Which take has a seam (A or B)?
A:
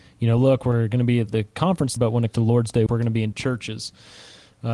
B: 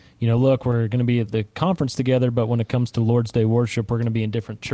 A